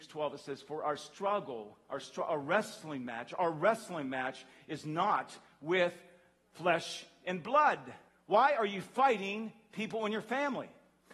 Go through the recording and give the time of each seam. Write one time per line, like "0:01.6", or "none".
0:08.1